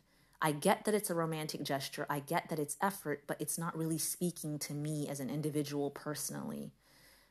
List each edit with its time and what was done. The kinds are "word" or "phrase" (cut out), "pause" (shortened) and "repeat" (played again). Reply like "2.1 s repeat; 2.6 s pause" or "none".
none